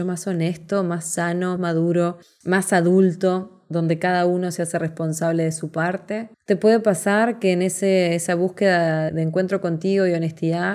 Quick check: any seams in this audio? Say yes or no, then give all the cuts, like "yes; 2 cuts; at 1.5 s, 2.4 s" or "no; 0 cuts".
yes; 2 cuts; at 1.6 s, 9.1 s